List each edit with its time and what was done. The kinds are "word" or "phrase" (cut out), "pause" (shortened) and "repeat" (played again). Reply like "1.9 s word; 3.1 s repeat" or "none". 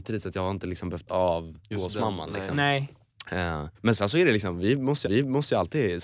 1.1 s word; 3.7 s pause; 5.0 s repeat